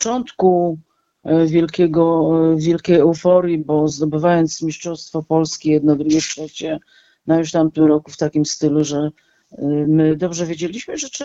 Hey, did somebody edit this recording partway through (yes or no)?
no